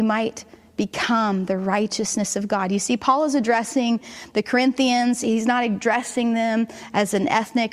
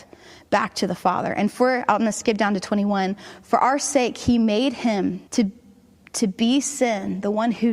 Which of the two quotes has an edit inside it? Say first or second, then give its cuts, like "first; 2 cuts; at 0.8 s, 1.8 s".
second; 1 cut; at 5.3 s